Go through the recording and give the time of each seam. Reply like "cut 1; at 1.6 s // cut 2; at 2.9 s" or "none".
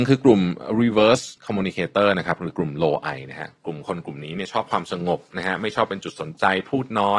cut 1; at 1.4 s // cut 2; at 3.6 s